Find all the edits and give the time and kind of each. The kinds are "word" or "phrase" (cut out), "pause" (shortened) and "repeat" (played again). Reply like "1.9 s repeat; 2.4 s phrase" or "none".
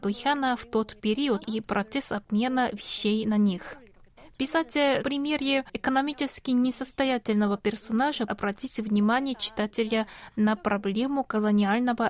1.4 s phrase; 5.0 s word; 8.3 s word